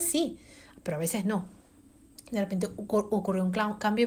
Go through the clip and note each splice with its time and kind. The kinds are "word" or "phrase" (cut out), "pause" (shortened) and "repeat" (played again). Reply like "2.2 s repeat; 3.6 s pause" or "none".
none